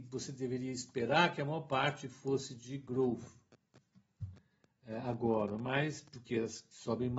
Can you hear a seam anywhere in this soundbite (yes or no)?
no